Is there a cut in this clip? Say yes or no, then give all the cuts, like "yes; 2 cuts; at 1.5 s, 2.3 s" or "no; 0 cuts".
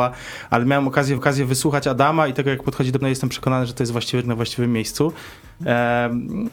yes; 3 cuts; at 1.2 s, 3.0 s, 4.2 s